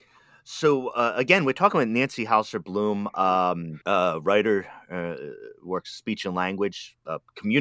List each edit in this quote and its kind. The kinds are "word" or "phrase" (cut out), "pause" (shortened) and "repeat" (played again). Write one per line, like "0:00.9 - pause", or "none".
0:03.8 - pause

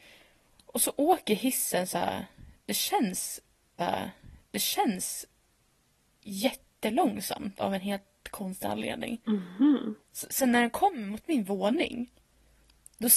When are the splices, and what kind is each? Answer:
0:03.8 - repeat
0:10.0 - pause

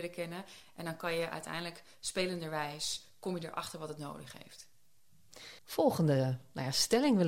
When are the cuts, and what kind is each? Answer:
0:05.6 - pause

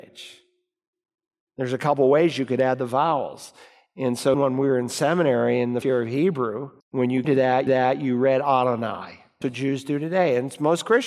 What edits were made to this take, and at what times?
0:04.3 - word
0:05.8 - word
0:06.8 - pause
0:07.2 - word
0:07.7 - repeat
0:09.4 - word

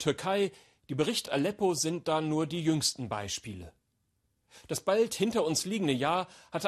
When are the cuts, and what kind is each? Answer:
0:01.3 - phrase

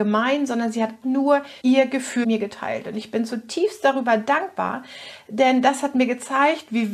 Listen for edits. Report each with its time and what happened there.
0:01.0 - word
0:01.6 - pause
0:02.2 - word

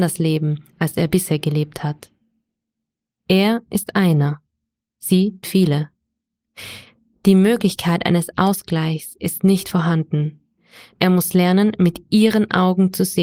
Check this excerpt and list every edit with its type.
0:05.4 - word

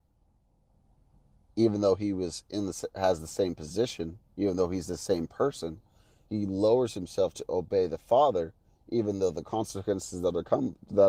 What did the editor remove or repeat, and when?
none

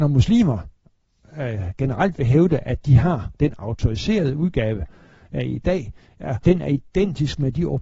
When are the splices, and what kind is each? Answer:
0:06.4 - word

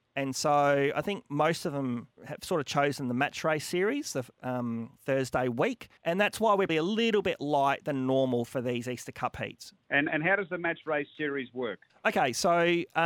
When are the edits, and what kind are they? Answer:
0:02.2 - word
0:05.0 - pause
0:06.0 - pause
0:06.7 - word
0:09.8 - pause
0:11.9 - pause

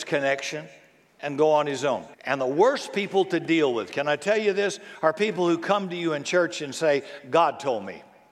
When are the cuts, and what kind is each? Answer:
0:02.1 - pause

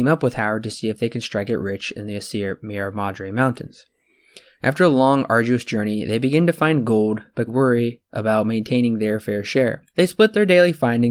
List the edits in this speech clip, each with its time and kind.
0:07.5 - word
0:09.9 - pause

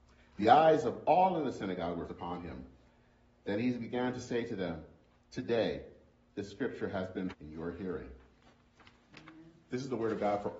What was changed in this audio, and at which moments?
0:02.1 - word
0:07.3 - word

